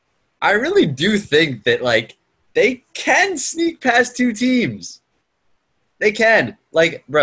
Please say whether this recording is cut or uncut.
cut